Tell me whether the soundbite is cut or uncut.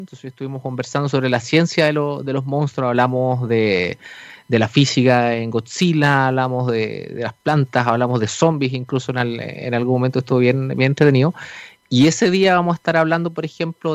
uncut